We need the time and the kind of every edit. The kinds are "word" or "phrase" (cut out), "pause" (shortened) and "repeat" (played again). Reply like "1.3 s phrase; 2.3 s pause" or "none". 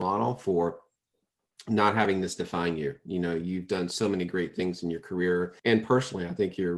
5.6 s pause